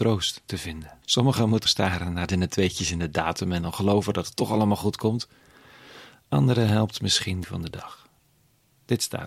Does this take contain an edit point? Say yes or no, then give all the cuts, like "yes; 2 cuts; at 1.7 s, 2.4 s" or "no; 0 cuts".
yes; 4 cuts; at 1.0 s, 1.6 s, 2.3 s, 7.4 s